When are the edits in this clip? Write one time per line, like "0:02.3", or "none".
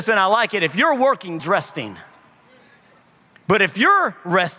0:01.4

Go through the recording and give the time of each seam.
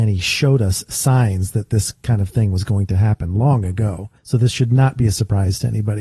0:04.2

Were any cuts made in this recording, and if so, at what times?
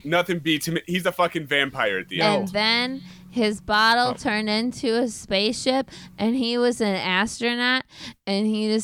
none

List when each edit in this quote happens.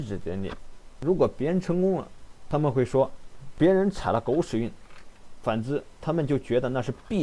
0:05.9

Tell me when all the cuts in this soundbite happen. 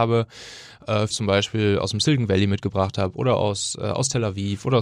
0:01.1

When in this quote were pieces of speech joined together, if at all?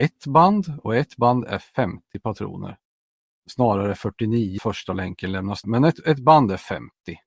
0:04.6
0:05.6

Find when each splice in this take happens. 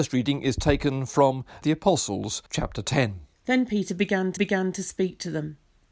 0:01.6
0:02.5
0:03.3
0:04.4

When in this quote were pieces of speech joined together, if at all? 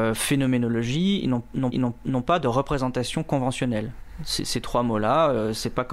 0:01.7

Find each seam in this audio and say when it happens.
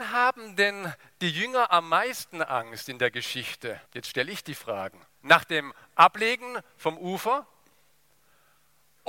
0:03.9
0:05.1

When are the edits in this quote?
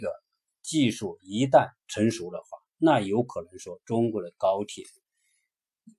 0:01.8
0:02.7

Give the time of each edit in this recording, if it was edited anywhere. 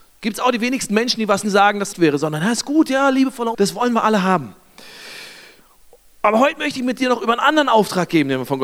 0:01.4
0:01.9
0:03.5

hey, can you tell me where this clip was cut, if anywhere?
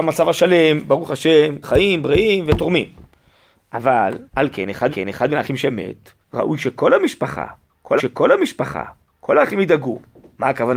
0:01.6
0:04.3
0:04.9
0:06.2
0:08.0

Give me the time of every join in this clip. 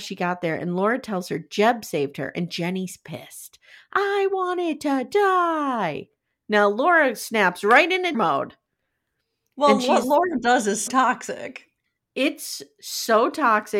0:08.1
0:10.9

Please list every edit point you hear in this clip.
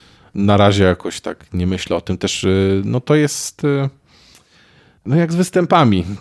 none

